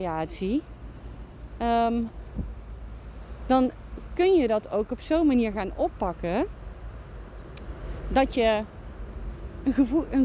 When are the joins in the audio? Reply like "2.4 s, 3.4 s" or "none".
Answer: none